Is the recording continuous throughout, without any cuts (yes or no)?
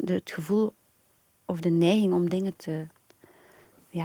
yes